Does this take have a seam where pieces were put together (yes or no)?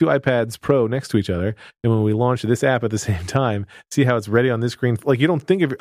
no